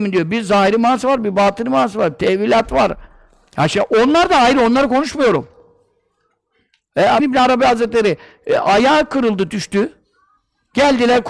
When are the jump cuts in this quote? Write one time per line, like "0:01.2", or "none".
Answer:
0:07.2